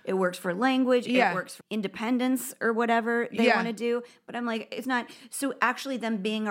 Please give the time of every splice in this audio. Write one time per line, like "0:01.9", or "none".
0:01.6
0:04.8

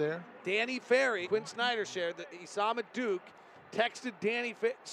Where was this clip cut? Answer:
0:01.2

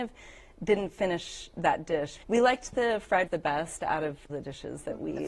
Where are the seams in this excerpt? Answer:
0:02.2
0:03.3
0:04.3

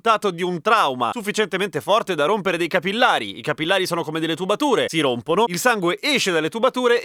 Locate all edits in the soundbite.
none

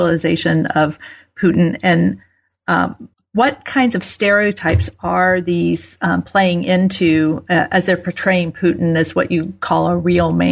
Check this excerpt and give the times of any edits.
0:03.1

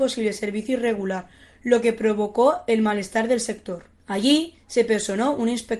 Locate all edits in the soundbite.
none

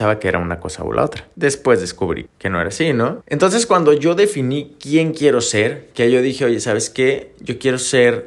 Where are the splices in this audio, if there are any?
0:02.3

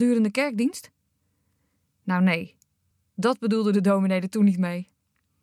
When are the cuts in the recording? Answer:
none

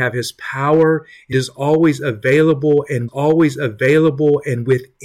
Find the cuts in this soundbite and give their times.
0:01.3
0:03.1

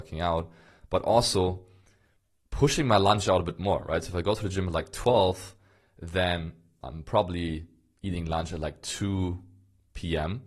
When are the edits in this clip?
none

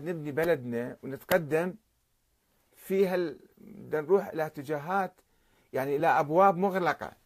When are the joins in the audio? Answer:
none

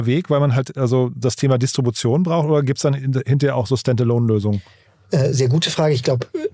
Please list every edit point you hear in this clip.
none

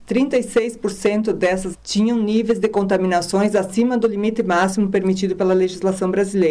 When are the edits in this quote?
0:01.7

